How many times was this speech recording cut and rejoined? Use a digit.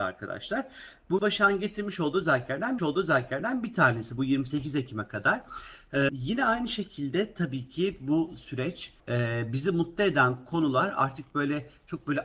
4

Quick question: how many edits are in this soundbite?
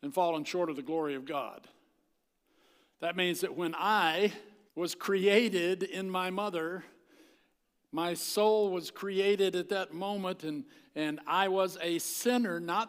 1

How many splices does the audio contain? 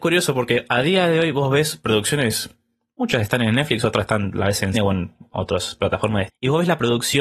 2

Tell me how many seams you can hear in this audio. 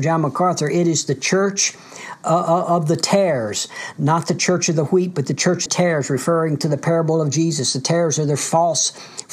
1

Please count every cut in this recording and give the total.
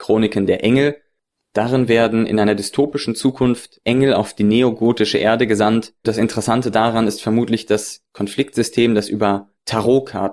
1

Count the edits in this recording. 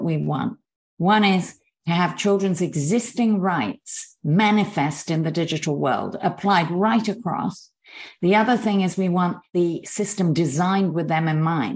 0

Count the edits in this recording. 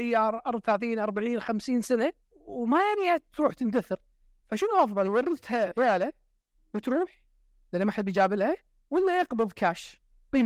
0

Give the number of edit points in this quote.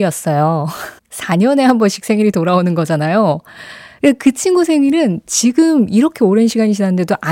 1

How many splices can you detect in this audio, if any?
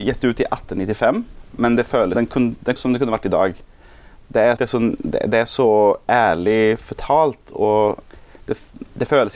3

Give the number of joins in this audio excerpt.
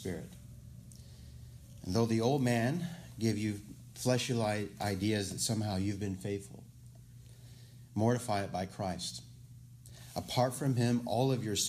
0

